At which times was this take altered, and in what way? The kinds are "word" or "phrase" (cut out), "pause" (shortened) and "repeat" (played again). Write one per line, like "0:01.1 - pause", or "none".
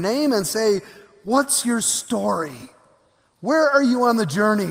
none